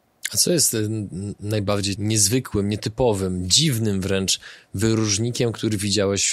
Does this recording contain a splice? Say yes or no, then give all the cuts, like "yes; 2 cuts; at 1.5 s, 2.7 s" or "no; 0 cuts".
yes; 1 cut; at 2.0 s